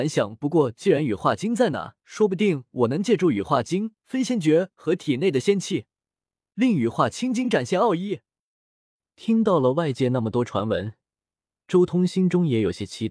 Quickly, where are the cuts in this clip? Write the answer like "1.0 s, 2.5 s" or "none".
2.0 s